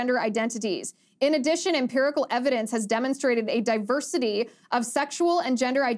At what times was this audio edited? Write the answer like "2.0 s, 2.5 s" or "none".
none